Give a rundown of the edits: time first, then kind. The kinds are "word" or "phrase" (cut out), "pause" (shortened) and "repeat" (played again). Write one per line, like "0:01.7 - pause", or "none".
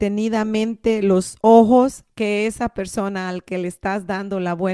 0:02.1 - pause

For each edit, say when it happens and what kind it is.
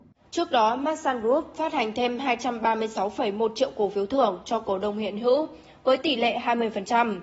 none

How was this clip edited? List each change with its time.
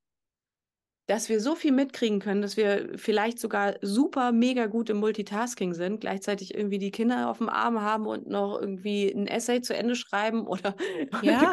none

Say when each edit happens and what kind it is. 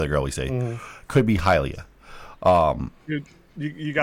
none

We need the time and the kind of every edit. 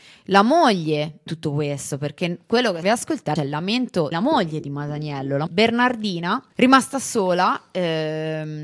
0:01.3 - word
0:02.8 - phrase
0:03.4 - word
0:04.1 - word
0:05.5 - word
0:06.5 - pause

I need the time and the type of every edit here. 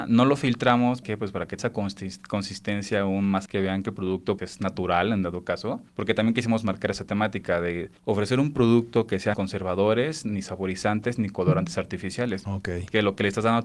0:01.0 - word
0:01.6 - word
0:03.5 - word
0:04.4 - word
0:05.9 - pause
0:08.0 - pause
0:09.3 - phrase

